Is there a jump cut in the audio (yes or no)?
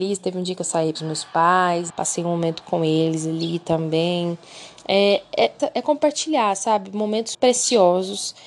yes